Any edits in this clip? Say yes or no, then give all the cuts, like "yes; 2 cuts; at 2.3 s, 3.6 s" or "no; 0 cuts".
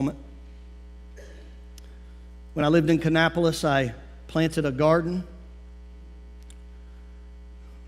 no; 0 cuts